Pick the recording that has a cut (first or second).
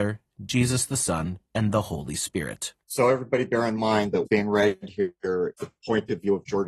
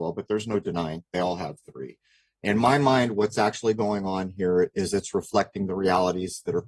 first